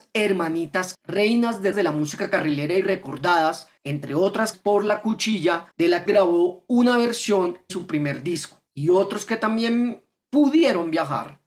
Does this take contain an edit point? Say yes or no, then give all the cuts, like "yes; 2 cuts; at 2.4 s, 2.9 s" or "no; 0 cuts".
yes; 8 cuts; at 0.9 s, 1.7 s, 3.8 s, 4.5 s, 5.7 s, 6.1 s, 7.7 s, 8.7 s